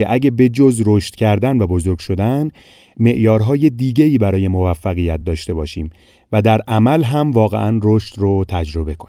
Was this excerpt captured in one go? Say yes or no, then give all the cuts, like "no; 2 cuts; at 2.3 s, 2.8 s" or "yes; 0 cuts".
yes; 0 cuts